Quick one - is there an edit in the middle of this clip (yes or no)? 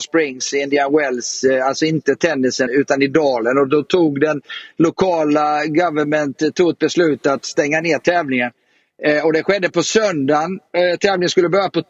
yes